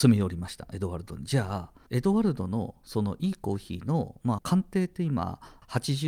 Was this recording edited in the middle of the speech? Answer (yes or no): yes